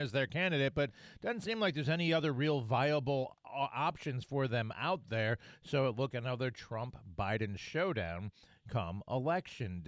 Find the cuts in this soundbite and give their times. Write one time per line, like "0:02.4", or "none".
0:06.1